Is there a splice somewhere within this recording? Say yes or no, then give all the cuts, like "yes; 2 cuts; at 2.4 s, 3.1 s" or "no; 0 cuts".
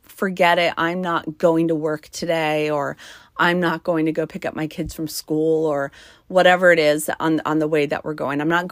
no; 0 cuts